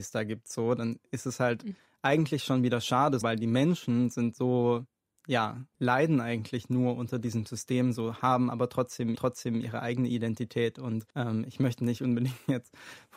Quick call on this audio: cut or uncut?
cut